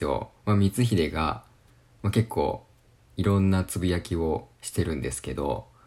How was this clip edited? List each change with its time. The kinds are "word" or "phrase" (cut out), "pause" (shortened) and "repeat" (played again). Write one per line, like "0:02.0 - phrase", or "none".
none